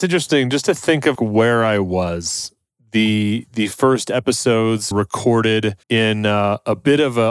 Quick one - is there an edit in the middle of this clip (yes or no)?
yes